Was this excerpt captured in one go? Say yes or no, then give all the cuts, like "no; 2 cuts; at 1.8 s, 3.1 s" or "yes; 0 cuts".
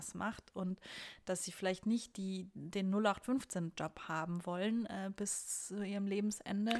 yes; 0 cuts